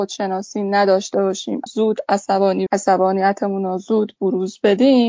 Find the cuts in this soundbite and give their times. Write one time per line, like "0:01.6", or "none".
0:01.7
0:02.7